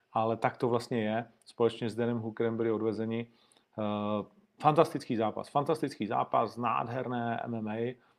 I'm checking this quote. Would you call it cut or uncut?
uncut